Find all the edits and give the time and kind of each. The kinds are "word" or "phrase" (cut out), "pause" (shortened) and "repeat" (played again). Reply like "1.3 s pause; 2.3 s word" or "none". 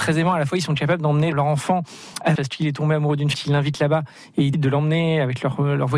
2.4 s word; 3.3 s word; 4.5 s word